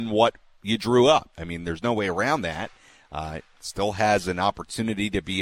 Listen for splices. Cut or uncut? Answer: uncut